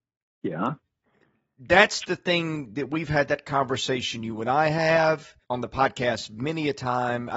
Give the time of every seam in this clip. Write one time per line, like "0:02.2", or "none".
0:05.4

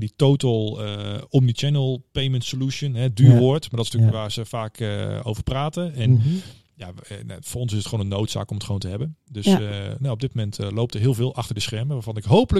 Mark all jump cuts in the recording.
none

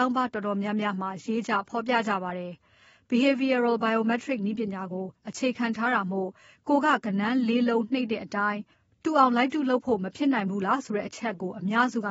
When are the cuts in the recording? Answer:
none

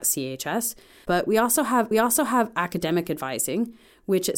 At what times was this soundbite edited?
0:01.9

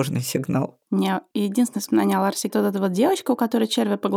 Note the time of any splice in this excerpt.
0:02.5

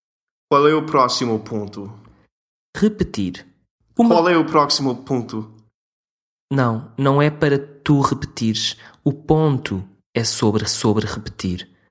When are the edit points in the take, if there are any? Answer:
0:10.7

